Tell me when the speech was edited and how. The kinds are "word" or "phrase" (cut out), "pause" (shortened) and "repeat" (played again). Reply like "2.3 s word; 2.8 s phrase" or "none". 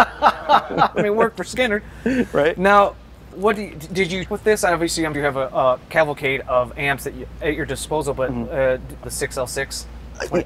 3.3 s word; 4.3 s word; 5.1 s word; 9.0 s phrase